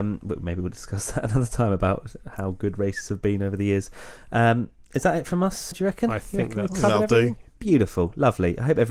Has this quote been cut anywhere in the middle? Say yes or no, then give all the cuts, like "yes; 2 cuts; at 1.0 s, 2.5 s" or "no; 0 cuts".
yes; 1 cut; at 5.7 s